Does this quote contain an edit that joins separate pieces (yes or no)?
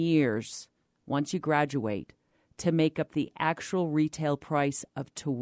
no